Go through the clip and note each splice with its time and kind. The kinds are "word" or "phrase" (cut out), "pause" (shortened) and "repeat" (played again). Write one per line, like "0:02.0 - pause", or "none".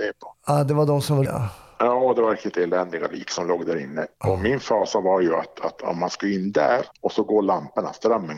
0:01.2 - phrase
0:04.1 - pause
0:06.9 - pause

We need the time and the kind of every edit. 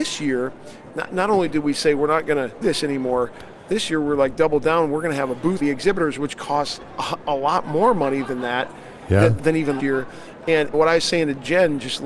0:02.6 - word
0:05.6 - word
0:09.4 - word
0:09.8 - word
0:10.7 - word

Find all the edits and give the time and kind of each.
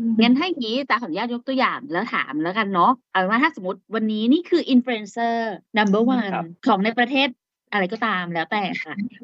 0:05.7 - pause
0:06.6 - pause

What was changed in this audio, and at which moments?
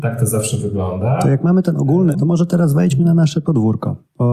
0:02.1 - word

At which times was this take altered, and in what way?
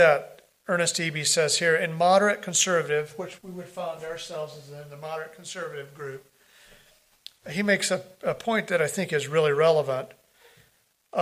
0:03.4 - word

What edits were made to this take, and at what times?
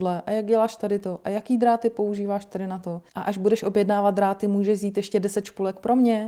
0:03.1 - pause

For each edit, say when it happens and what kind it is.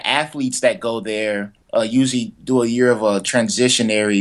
0:01.6 - pause

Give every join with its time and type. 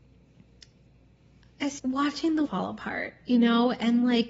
0:01.8 - word
0:02.4 - word

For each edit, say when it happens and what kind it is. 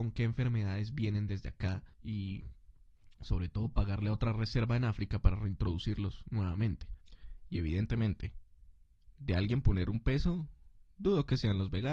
0:01.9 - pause

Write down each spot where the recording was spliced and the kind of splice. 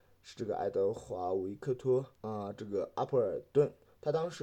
0:02.1 - pause

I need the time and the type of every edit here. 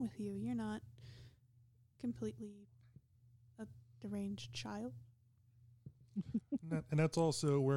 none

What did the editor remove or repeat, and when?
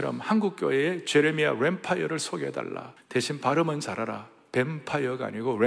0:03.0 - pause

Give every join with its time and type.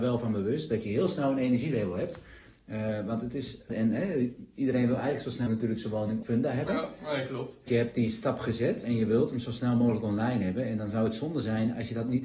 0:03.7 - word
0:05.5 - word
0:06.2 - word
0:07.7 - word
0:08.8 - word

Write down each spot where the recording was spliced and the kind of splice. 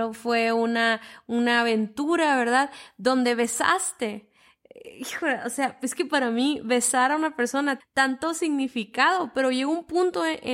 0:07.8 - word

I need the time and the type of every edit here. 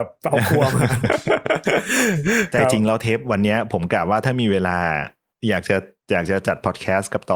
none

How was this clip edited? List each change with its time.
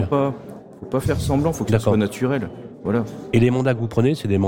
none

